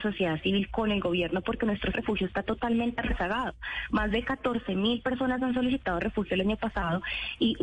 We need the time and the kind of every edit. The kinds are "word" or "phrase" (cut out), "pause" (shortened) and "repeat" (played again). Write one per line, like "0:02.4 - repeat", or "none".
0:01.9 - word